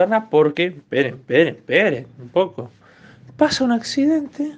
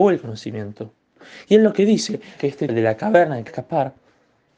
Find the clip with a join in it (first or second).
second